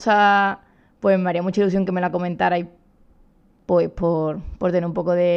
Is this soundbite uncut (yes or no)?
yes